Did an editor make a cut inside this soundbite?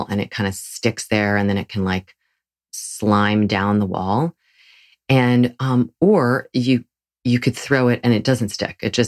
no; 0 cuts

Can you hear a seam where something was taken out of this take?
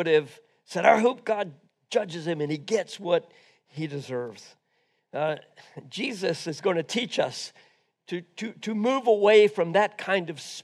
no; 0 cuts

